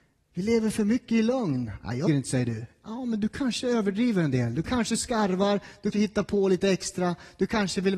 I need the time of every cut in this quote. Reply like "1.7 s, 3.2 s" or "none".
2.1 s, 5.9 s